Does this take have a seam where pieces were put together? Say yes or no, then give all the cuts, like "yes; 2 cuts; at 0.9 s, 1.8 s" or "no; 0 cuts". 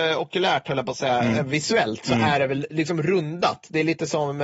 no; 0 cuts